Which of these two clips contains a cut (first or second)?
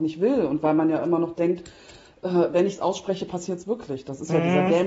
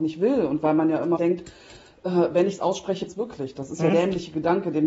second